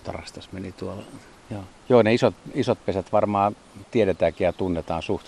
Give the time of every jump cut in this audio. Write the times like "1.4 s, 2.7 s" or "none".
1.8 s, 3.9 s